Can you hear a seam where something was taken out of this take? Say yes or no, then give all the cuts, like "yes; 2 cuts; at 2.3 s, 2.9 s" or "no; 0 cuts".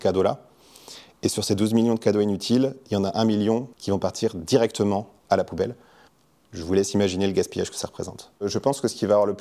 yes; 2 cuts; at 3.7 s, 6.1 s